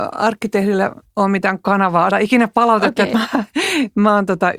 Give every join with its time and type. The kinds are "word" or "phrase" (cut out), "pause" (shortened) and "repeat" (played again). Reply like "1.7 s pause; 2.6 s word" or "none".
2.1 s word